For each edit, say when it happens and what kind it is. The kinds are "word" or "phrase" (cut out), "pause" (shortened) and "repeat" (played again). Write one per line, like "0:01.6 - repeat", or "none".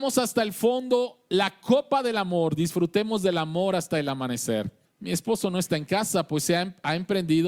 0:04.9 - pause